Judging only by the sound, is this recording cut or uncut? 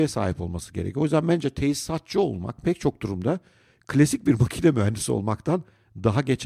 uncut